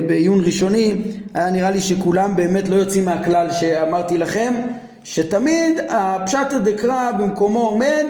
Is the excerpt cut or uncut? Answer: uncut